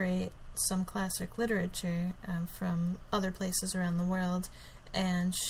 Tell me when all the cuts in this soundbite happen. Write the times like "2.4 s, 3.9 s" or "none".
none